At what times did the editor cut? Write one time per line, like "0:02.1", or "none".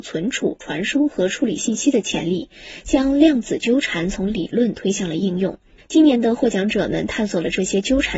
0:05.8